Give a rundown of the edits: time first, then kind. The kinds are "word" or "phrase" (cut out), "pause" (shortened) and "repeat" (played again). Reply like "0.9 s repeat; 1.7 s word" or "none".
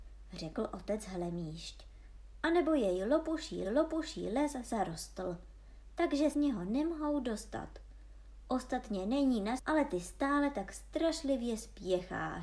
3.6 s repeat; 6.3 s phrase; 9.6 s word

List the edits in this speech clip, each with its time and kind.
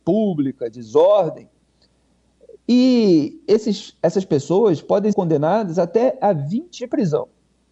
5.1 s word; 6.8 s word

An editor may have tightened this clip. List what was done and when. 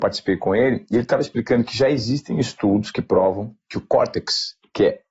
none

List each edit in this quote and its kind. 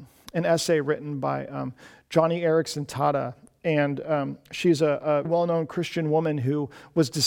5.2 s word

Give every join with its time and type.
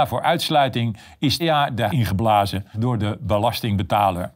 1.4 s word; 1.9 s word; 2.7 s word

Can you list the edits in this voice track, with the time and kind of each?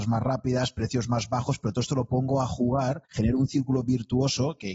3.1 s pause

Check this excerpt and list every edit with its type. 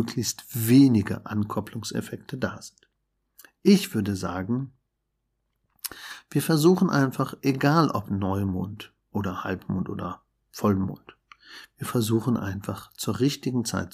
none

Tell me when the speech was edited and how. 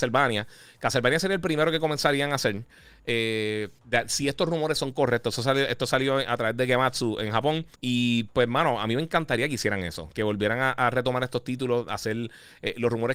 3.8 s pause; 7.7 s pause

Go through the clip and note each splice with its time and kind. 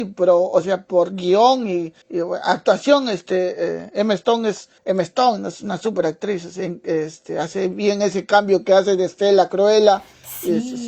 2.0 s pause; 4.8 s pause

